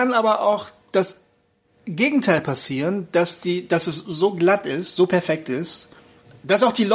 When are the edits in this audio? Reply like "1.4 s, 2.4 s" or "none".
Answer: none